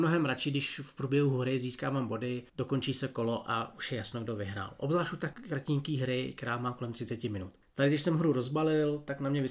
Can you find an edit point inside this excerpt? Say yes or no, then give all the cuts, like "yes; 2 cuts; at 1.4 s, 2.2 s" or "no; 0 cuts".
yes; 1 cut; at 2.5 s